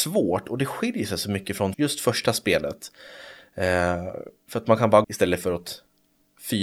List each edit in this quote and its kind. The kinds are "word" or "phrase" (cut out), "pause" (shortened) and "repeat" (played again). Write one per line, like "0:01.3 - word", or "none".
0:01.7 - word
0:05.0 - phrase